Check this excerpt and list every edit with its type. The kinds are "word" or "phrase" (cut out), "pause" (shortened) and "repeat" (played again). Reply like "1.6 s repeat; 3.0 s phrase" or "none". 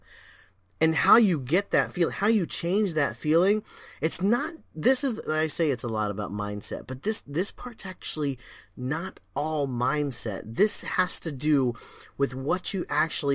none